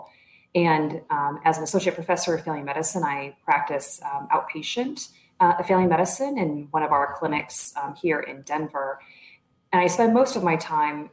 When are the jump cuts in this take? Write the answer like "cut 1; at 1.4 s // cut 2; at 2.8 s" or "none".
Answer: none